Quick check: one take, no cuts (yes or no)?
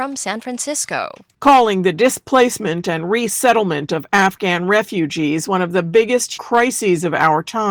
no